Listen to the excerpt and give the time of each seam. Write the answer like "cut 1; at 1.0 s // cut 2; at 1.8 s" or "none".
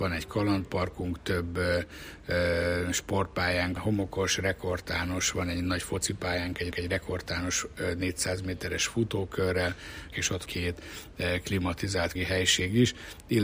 cut 1; at 3.8 s // cut 2; at 6.7 s // cut 3; at 10.1 s // cut 4; at 10.4 s // cut 5; at 12.1 s